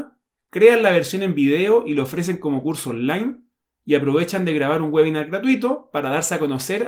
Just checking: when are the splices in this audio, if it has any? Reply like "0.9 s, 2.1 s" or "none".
none

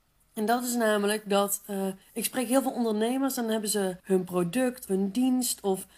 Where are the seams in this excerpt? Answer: 2.0 s, 4.0 s, 4.9 s

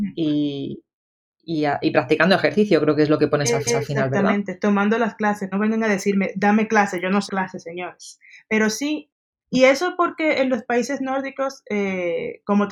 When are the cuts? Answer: 3.7 s, 5.5 s, 7.3 s

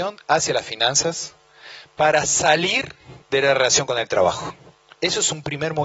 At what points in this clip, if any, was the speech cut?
3.2 s, 4.7 s

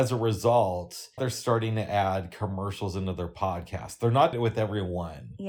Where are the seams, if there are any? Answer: 1.2 s, 4.3 s

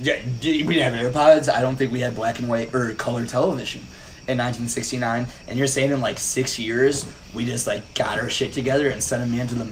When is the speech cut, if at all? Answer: none

